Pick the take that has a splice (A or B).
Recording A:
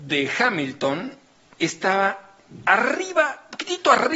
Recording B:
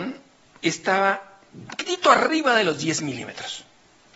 B